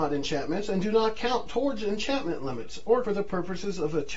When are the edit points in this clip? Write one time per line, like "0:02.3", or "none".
0:03.0